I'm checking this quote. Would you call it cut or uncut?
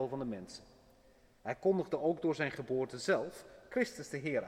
uncut